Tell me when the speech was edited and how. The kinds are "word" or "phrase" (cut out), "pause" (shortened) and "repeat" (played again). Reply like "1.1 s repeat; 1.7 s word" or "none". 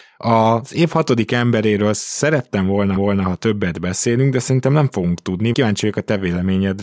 3.0 s repeat; 5.5 s word